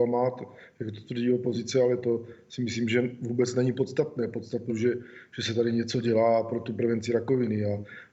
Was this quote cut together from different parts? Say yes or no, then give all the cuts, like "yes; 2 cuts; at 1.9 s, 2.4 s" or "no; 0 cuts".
yes; 1 cut; at 4.7 s